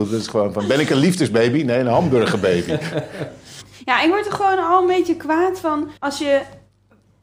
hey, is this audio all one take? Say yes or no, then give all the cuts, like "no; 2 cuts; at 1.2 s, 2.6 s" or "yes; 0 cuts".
no; 1 cut; at 6.0 s